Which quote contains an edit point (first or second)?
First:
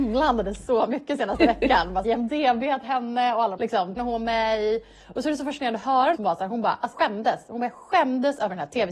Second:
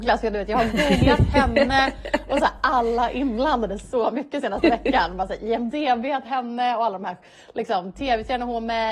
first